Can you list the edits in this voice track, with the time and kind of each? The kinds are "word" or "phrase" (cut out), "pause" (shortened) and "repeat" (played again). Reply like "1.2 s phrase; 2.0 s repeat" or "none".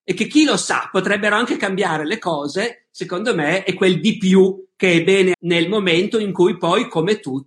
5.3 s word